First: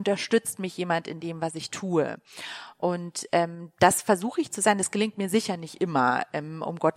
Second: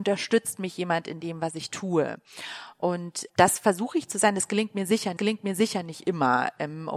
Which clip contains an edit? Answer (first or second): second